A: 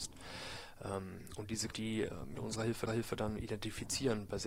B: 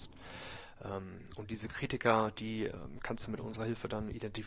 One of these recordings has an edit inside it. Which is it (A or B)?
A